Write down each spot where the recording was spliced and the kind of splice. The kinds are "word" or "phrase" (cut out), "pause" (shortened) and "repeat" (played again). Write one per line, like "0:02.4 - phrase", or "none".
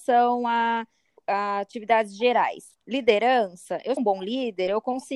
0:01.2 - word
0:04.0 - word